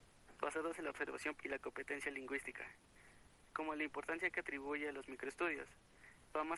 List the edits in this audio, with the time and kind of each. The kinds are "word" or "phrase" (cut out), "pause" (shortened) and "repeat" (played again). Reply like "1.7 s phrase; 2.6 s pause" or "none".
1.4 s word